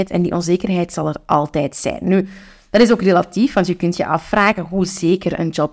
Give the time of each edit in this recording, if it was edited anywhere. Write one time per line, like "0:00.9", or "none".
none